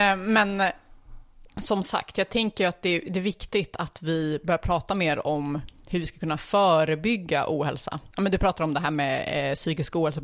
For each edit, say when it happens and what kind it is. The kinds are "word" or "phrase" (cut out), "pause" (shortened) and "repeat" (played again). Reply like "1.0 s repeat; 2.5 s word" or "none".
1.5 s pause; 8.1 s pause